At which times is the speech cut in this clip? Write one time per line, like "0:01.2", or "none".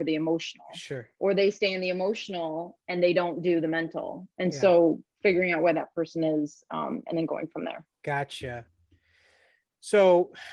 0:07.9